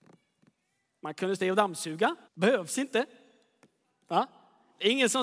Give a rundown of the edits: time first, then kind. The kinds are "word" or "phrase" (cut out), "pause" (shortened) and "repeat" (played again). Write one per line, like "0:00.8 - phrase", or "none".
0:01.4 - word
0:02.2 - pause